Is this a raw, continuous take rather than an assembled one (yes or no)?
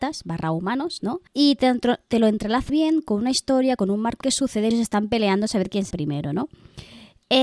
no